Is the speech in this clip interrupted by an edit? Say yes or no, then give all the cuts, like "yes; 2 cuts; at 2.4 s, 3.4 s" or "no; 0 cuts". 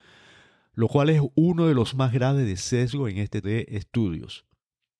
yes; 2 cuts; at 1.9 s, 3.4 s